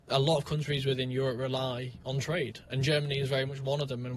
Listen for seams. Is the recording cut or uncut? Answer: uncut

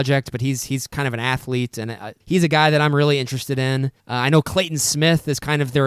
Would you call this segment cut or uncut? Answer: cut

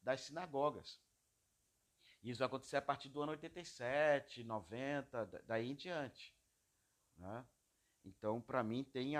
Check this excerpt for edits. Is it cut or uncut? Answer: uncut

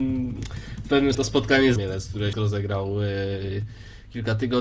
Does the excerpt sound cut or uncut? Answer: cut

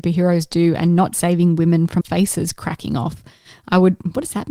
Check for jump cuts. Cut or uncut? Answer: cut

